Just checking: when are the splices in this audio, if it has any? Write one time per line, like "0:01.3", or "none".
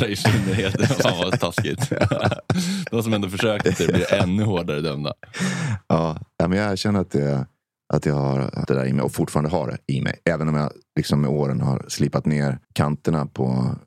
0:03.6
0:07.6
0:08.6
0:12.6